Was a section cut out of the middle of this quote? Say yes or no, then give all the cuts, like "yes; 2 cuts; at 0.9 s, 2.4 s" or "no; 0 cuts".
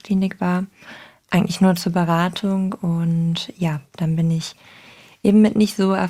no; 0 cuts